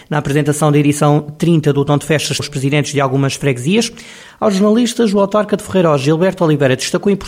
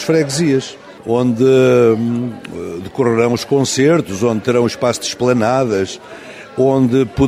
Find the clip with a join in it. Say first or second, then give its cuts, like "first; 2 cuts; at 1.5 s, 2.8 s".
first; 1 cut; at 2.4 s